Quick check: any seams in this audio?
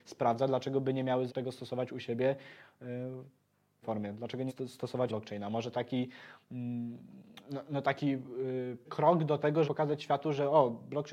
yes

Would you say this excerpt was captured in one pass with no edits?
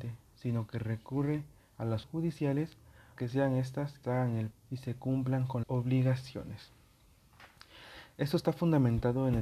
no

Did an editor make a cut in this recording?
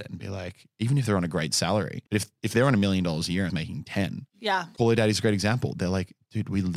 yes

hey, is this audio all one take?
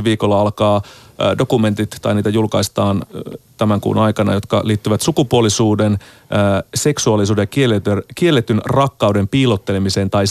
yes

